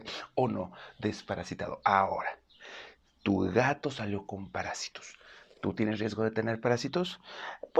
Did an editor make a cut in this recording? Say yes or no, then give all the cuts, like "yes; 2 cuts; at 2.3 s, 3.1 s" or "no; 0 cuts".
no; 0 cuts